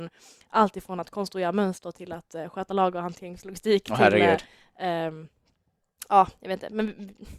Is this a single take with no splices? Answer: yes; 0 cuts

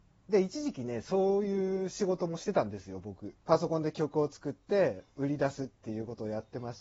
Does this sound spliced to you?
yes; 1 cut; at 3.4 s

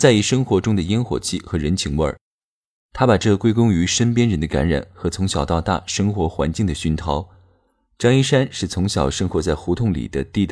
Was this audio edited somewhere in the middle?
no; 0 cuts

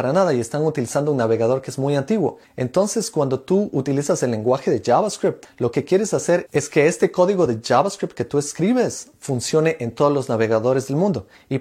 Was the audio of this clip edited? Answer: no; 0 cuts

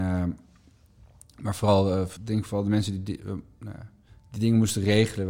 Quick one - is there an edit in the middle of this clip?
yes; 2 cuts; at 2.2 s, 4.1 s

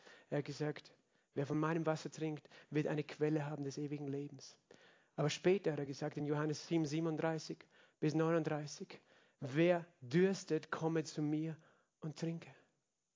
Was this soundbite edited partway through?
no; 0 cuts

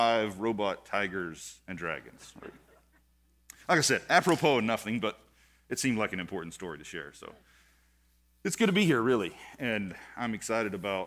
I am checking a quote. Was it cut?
no; 0 cuts

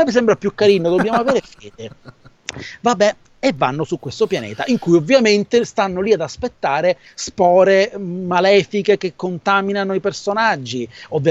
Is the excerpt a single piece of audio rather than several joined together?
yes; 0 cuts

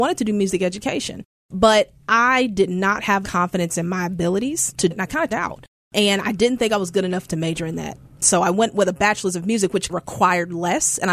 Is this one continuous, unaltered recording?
no; 4 cuts; at 3.2 s, 4.9 s, 5.3 s, 9.9 s

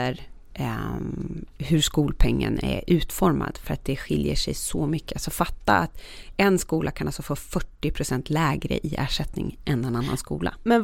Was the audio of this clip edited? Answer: no; 0 cuts

